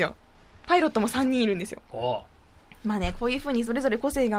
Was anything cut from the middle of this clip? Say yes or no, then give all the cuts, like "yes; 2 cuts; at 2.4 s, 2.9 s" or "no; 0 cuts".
no; 0 cuts